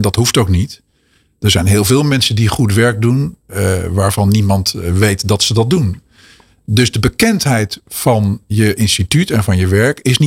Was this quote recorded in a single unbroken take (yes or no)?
yes